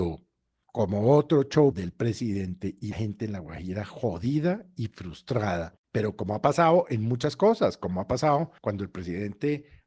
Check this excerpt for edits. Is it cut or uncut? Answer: cut